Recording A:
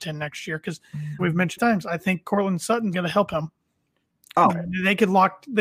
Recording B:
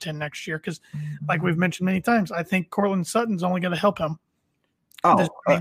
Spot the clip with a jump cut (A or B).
A